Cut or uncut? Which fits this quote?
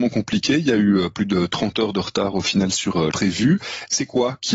cut